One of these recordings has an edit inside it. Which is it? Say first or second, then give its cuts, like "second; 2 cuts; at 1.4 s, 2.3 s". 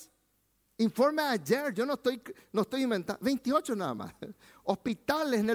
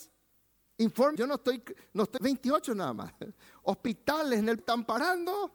second; 3 cuts; at 1.2 s, 2.2 s, 4.6 s